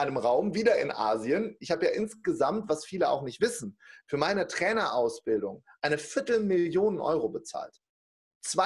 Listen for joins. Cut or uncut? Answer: uncut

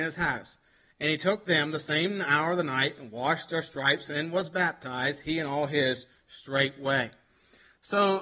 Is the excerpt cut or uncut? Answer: uncut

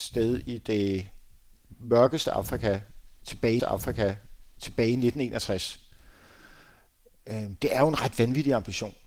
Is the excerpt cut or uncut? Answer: cut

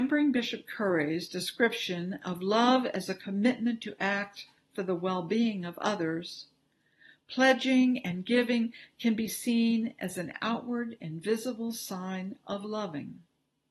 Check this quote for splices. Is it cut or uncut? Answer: uncut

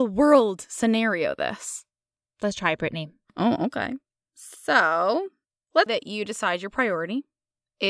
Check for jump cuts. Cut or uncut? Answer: cut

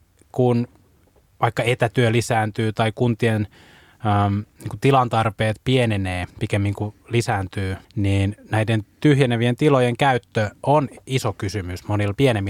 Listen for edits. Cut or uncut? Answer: cut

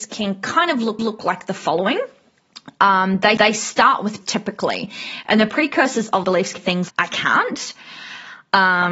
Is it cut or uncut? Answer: cut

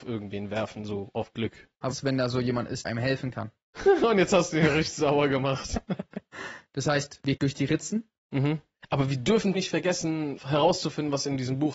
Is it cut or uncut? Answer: cut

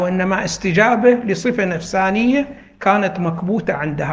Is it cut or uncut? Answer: uncut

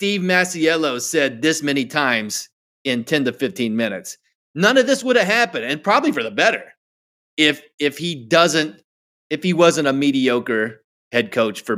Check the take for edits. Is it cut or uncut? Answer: uncut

